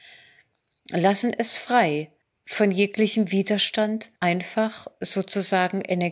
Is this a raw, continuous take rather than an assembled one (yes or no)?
no